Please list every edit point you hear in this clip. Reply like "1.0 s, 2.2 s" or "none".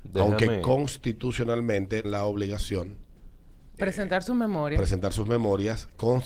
2.0 s, 3.8 s